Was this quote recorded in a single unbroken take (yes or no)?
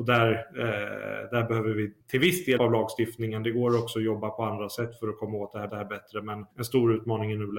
no